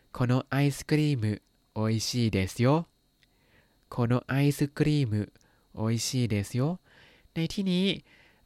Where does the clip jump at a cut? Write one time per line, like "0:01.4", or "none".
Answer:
none